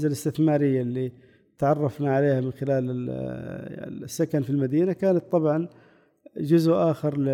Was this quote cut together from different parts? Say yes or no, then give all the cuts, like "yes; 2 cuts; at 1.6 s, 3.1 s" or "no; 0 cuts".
no; 0 cuts